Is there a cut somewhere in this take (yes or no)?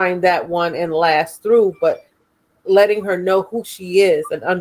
no